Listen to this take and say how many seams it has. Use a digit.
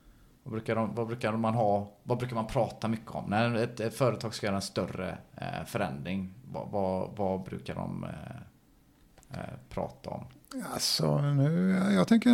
0